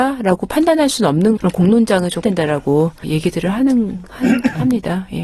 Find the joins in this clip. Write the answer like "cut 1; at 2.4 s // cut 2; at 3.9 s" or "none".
cut 1; at 1.4 s // cut 2; at 2.2 s // cut 3; at 3.0 s

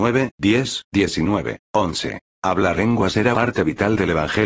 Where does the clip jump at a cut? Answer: cut 1; at 1.6 s // cut 2; at 2.8 s // cut 3; at 3.3 s

